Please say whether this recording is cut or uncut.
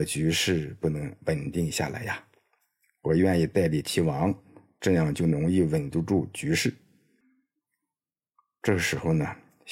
uncut